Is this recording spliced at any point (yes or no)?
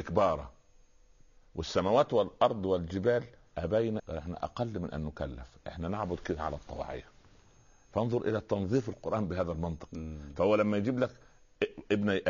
yes